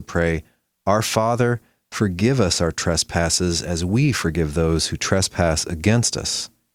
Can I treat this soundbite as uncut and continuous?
yes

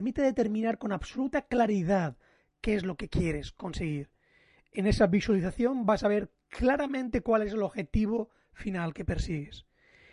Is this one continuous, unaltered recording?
yes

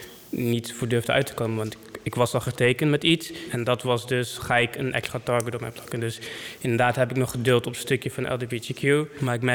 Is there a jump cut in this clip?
no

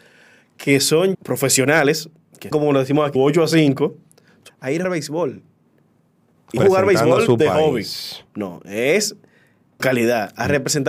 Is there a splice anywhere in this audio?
yes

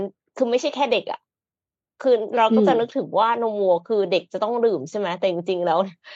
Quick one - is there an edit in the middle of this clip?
no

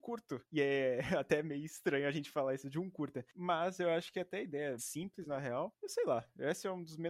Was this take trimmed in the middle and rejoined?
yes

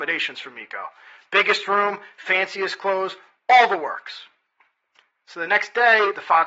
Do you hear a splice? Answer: no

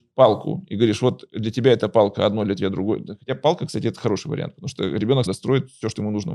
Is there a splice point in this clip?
yes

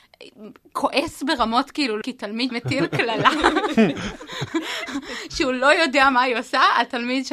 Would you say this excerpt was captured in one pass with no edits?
no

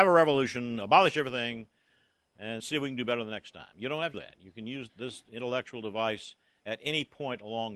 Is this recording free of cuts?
no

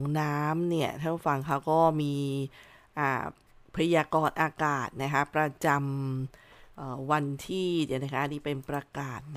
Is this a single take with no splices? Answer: no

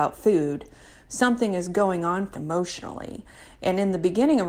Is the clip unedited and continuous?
no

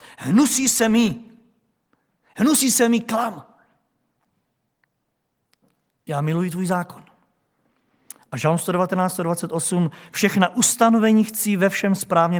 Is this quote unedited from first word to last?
yes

